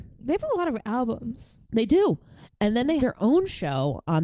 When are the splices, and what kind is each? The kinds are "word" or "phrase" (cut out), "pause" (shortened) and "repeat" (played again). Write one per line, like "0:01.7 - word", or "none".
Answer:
0:01.6 - pause
0:03.0 - word